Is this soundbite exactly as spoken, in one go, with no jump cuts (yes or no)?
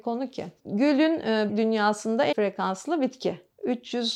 no